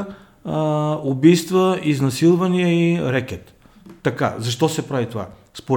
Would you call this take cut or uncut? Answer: uncut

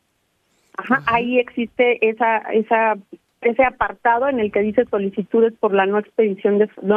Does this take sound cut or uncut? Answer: uncut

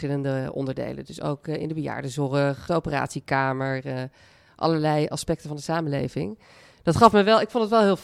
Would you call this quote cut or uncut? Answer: cut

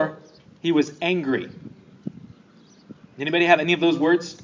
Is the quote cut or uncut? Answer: uncut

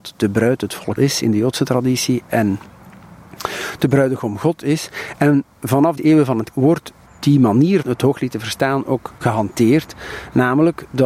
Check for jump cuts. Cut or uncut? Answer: cut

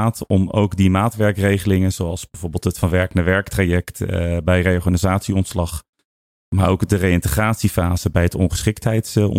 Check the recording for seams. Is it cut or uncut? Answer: uncut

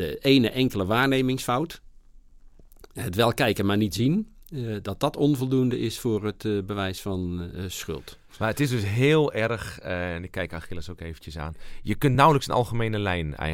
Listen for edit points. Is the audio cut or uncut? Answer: uncut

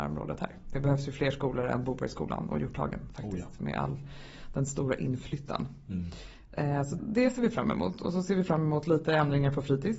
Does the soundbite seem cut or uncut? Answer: cut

